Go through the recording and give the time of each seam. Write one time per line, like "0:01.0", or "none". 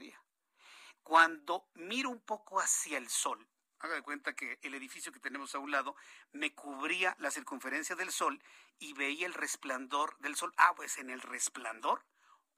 0:10.7